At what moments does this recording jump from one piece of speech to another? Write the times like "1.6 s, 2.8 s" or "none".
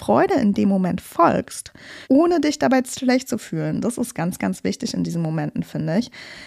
2.0 s